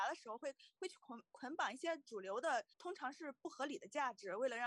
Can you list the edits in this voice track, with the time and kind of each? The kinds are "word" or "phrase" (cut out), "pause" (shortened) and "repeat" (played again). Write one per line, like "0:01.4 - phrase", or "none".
0:02.7 - pause